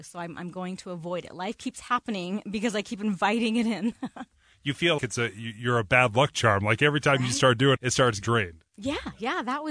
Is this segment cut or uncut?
cut